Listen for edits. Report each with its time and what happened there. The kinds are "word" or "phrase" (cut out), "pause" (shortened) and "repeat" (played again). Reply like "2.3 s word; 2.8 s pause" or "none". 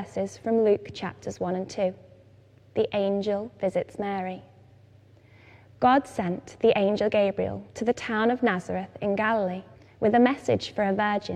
7.7 s pause; 9.7 s pause